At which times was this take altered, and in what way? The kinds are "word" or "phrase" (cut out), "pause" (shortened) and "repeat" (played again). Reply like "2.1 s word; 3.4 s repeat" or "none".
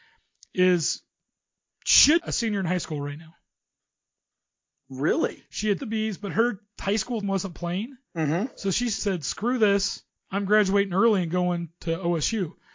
2.2 s word; 5.8 s phrase; 7.2 s word; 8.0 s pause; 9.0 s word; 10.1 s pause